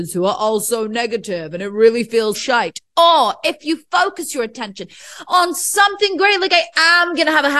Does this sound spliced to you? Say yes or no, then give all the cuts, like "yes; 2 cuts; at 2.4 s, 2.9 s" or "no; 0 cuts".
yes; 1 cut; at 2.3 s